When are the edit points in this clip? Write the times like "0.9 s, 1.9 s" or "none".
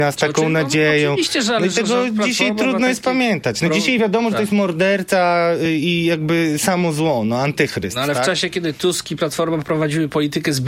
none